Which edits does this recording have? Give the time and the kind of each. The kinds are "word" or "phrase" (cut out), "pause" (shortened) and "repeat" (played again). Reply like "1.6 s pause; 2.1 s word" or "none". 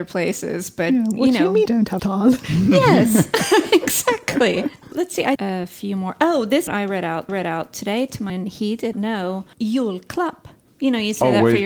1.7 s word; 2.0 s phrase; 5.4 s phrase; 6.7 s phrase; 7.3 s repeat; 8.3 s word; 8.9 s word